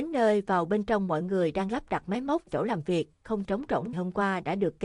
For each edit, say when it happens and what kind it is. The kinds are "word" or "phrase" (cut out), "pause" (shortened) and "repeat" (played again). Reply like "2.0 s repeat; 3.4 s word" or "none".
2.5 s word; 3.4 s word; 3.9 s word